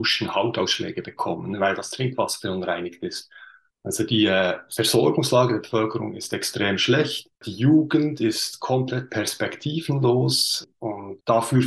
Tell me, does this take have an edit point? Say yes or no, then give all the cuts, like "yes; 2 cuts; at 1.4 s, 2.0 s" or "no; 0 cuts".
no; 0 cuts